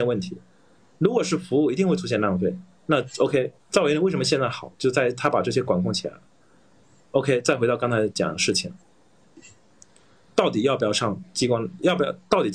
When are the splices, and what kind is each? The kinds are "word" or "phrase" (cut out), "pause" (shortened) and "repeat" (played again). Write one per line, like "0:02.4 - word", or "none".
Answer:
none